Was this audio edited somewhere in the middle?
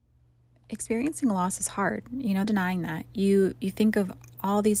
yes; 1 cut; at 2.4 s

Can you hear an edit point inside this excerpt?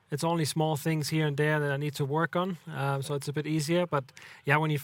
no; 0 cuts

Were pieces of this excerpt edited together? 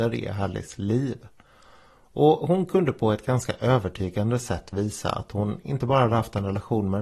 no; 0 cuts

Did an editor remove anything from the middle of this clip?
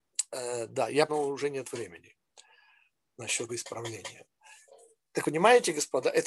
yes; 3 cuts; at 1.1 s, 3.5 s, 5.2 s

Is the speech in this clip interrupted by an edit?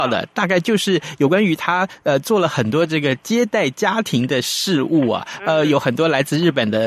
no; 0 cuts

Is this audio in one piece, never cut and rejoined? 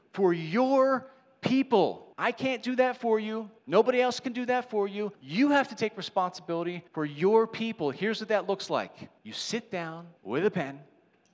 no; 6 cuts; at 2.1 s, 3.6 s, 5.1 s, 6.9 s, 9.2 s, 10.2 s

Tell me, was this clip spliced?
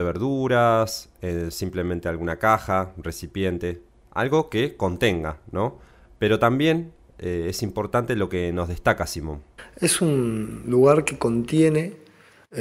no; 0 cuts

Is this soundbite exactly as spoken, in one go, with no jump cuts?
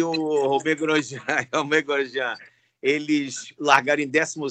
yes; 0 cuts

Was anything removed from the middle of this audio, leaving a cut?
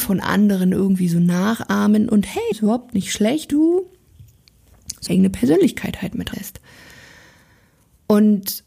yes; 4 cuts; at 2.5 s, 3.5 s, 5.1 s, 6.3 s

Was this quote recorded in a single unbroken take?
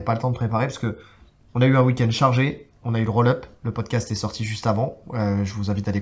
yes; 0 cuts

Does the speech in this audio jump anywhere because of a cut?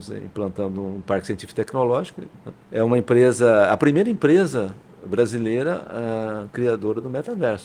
yes; 1 cut; at 2.6 s

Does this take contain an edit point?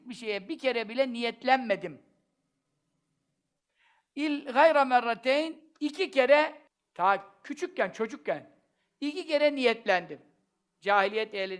yes; 1 cut; at 6.7 s

